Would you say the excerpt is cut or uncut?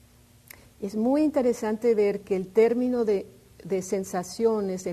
uncut